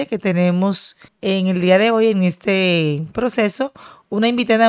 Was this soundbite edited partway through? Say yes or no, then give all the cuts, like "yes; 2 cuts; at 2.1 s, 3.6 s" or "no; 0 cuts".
yes; 1 cut; at 1.1 s